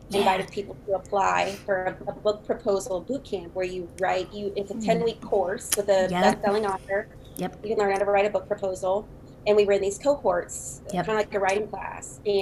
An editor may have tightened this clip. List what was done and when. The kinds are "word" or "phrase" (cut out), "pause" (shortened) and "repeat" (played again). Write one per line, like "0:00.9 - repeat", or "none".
none